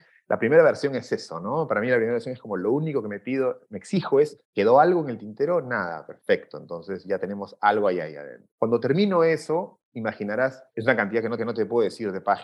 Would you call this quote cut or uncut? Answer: cut